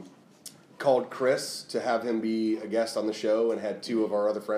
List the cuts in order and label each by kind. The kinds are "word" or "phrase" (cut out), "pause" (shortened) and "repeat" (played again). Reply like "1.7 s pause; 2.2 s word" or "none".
none